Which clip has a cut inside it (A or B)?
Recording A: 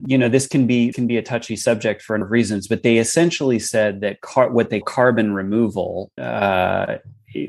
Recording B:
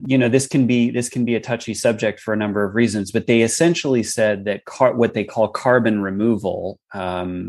A